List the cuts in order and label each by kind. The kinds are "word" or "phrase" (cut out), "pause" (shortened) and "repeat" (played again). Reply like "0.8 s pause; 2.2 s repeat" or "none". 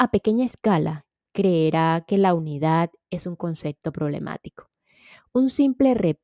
none

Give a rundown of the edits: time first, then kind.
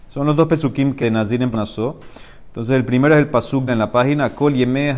1.0 s word; 1.5 s word; 3.7 s word

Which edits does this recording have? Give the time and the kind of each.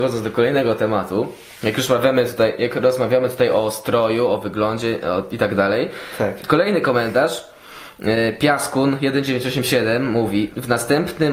none

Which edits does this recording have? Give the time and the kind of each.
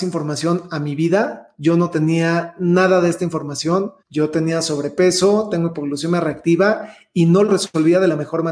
4.0 s pause; 7.4 s word

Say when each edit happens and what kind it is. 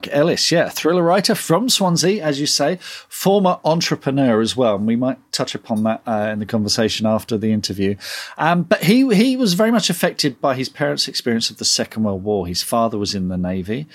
none

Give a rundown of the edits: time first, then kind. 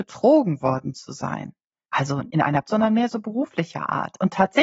2.3 s word; 2.6 s word

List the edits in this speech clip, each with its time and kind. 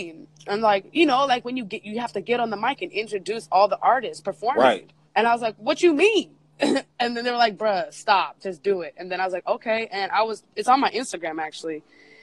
5.1 s pause

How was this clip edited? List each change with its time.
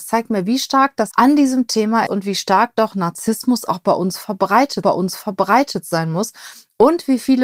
1.1 s word; 2.1 s word; 4.8 s repeat

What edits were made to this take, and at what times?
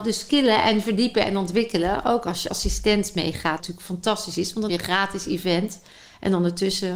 2.5 s word; 3.6 s word; 4.7 s word

